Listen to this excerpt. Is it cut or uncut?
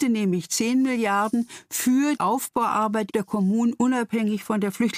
cut